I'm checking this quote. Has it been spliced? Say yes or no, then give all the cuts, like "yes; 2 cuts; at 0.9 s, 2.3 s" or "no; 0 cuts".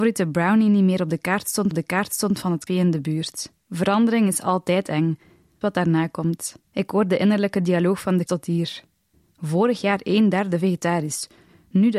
yes; 7 cuts; at 1.7 s, 2.7 s, 3.6 s, 5.6 s, 6.7 s, 8.3 s, 9.1 s